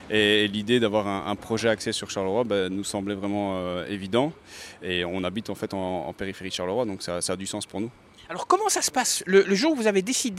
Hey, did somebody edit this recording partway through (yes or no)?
no